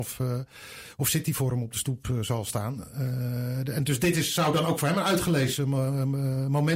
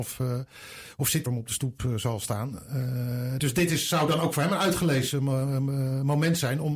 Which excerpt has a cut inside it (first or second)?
second